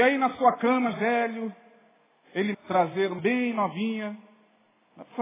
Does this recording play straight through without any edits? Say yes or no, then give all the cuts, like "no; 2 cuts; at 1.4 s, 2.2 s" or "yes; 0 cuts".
no; 3 cuts; at 0.9 s, 2.5 s, 3.2 s